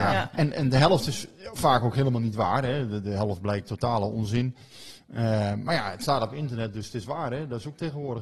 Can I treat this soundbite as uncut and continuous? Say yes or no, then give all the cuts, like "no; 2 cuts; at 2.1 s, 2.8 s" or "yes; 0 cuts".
yes; 0 cuts